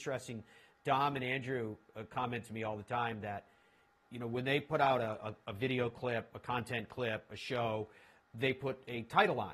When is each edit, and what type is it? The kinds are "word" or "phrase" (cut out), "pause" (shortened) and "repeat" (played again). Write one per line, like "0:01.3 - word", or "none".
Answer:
none